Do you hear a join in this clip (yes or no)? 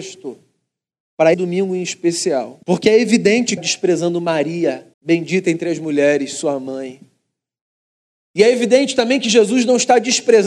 yes